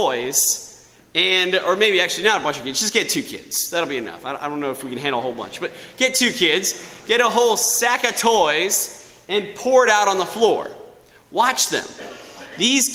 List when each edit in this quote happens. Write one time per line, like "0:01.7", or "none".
none